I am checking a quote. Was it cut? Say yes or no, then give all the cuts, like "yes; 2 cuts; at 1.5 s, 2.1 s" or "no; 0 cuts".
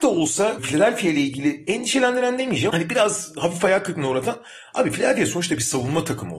yes; 1 cut; at 2.7 s